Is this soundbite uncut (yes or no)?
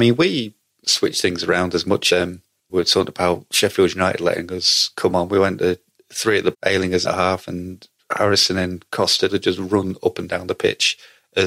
no